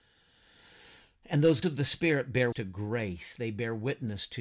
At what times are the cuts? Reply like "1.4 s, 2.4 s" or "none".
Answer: 1.6 s, 2.5 s